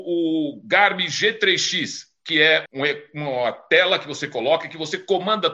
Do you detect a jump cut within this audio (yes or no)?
yes